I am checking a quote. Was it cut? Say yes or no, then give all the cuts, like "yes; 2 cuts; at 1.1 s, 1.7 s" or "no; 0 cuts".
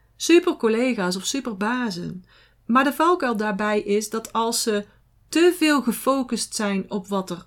no; 0 cuts